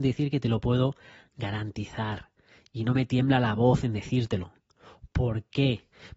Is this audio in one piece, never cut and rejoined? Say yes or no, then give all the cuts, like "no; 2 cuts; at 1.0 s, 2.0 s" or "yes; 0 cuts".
yes; 0 cuts